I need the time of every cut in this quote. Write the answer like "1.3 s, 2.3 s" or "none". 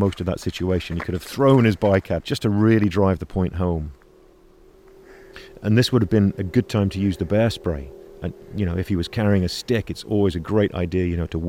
2.2 s